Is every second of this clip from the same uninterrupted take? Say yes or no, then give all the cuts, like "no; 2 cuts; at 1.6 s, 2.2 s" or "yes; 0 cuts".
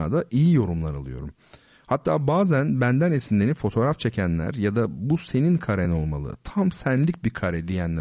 yes; 0 cuts